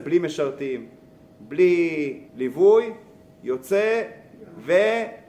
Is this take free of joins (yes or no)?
no